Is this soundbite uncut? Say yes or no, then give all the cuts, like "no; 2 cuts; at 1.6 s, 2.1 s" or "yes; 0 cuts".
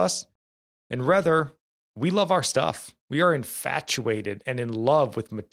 no; 2 cuts; at 1.6 s, 3.0 s